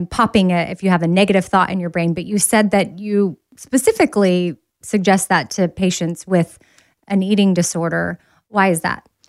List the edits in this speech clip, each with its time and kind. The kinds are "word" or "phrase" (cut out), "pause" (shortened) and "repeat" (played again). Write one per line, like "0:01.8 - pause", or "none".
none